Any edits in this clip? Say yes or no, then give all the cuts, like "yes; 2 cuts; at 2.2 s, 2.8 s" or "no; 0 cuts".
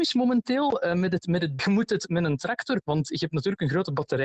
yes; 2 cuts; at 1.6 s, 2.8 s